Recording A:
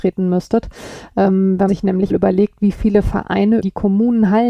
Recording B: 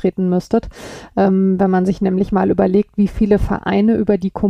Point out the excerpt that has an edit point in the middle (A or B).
A